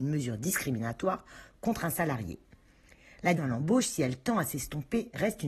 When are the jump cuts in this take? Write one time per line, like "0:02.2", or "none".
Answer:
0:03.4